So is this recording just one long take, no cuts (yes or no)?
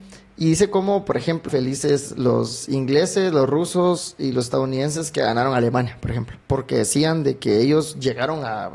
no